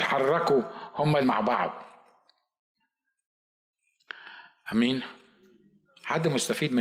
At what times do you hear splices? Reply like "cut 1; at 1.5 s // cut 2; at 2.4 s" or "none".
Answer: cut 1; at 1.2 s